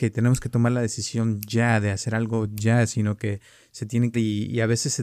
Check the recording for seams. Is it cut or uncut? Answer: cut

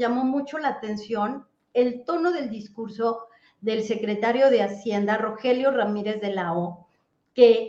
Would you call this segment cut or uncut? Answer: uncut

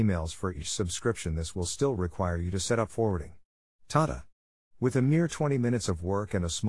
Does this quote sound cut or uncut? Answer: uncut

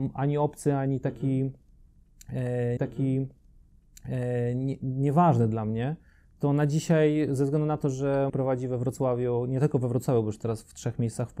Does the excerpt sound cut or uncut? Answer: cut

